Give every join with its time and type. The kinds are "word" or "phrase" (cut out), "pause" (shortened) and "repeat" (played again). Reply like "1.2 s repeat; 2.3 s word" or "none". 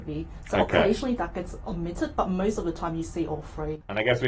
none